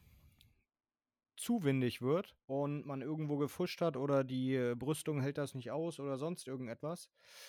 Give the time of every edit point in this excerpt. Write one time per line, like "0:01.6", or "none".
0:02.4